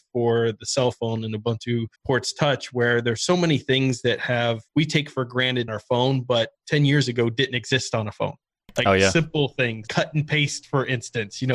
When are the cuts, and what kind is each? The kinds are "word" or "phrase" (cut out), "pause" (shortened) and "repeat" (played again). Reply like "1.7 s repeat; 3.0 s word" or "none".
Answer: 2.0 s pause; 4.7 s pause; 5.7 s phrase; 9.9 s word